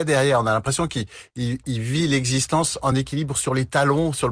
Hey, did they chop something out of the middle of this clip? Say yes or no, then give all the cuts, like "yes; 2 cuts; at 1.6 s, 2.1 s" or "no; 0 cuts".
no; 0 cuts